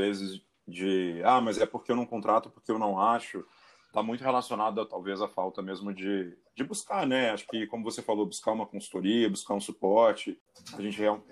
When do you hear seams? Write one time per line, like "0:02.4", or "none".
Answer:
none